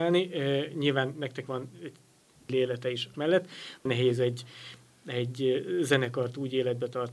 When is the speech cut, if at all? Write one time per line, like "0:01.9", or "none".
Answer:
0:01.5
0:02.5
0:03.1
0:03.9